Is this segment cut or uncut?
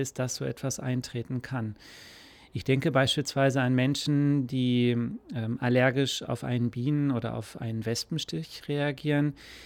uncut